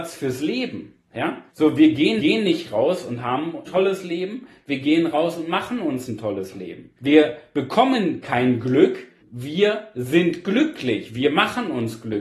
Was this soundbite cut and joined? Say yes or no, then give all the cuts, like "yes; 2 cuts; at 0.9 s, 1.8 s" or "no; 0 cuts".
yes; 5 cuts; at 1.5 s, 2.2 s, 3.7 s, 7.0 s, 9.2 s